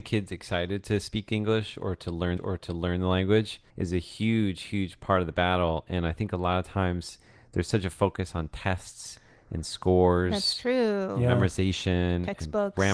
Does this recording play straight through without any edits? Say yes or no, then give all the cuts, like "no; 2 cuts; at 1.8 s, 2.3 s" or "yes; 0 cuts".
no; 2 cuts; at 2.4 s, 3.7 s